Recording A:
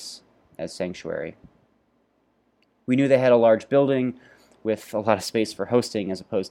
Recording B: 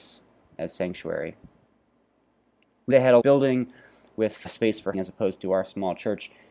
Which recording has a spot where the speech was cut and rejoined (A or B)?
B